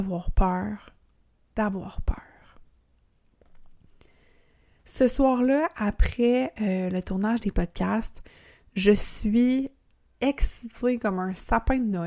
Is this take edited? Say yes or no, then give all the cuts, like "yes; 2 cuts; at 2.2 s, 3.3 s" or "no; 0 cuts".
no; 0 cuts